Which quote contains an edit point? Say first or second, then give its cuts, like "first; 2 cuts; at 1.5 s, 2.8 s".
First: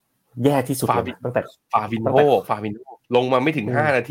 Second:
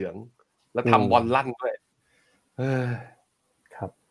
first; 1 cut; at 3.0 s